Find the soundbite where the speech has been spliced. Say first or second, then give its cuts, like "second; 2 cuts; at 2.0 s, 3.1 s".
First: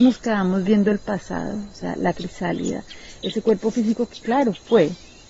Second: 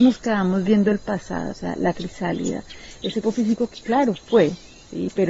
second; 2 cuts; at 1.5 s, 3.2 s